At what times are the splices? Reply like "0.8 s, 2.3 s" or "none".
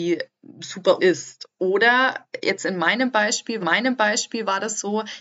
1.0 s, 3.6 s